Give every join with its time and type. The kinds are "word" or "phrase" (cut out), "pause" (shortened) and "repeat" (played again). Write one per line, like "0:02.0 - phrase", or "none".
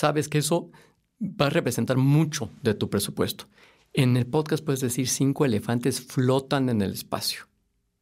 none